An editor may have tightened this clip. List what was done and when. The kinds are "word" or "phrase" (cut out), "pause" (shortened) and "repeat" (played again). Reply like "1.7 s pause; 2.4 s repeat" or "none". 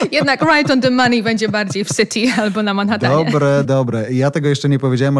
3.6 s word